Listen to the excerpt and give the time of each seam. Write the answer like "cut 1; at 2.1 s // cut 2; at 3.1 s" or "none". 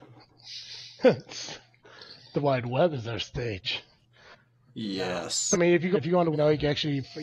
cut 1; at 2.4 s // cut 2; at 5.5 s // cut 3; at 5.9 s // cut 4; at 6.3 s